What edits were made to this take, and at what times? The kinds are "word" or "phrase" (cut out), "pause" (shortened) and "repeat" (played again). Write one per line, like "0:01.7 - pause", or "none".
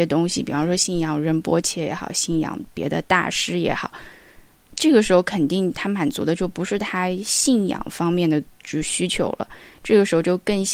none